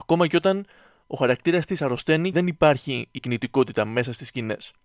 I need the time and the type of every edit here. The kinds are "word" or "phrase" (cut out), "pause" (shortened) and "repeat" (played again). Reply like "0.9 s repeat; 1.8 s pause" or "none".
2.3 s word; 3.2 s word